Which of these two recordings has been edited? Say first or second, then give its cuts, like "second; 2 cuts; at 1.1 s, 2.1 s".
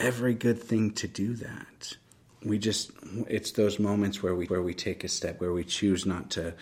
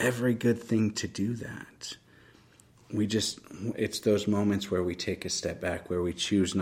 first; 3 cuts; at 2.1 s, 4.5 s, 5.4 s